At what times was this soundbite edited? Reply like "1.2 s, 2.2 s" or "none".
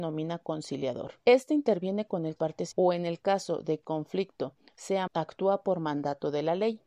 1.2 s, 2.4 s, 2.7 s, 3.8 s, 5.1 s